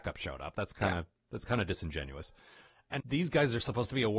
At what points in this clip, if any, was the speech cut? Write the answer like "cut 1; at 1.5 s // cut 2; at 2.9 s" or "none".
cut 1; at 3.0 s